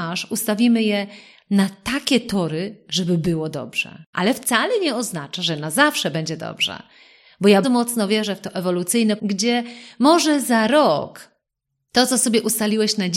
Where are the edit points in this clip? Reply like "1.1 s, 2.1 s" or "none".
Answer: 7.6 s, 9.2 s